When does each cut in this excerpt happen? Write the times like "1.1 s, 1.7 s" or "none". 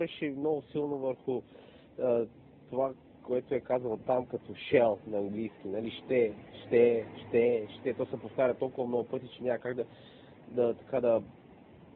none